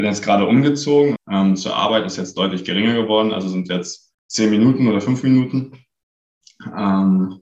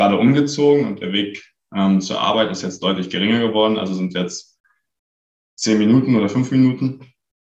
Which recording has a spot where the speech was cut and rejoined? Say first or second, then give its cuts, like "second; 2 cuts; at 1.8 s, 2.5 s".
first; 2 cuts; at 1.2 s, 4.2 s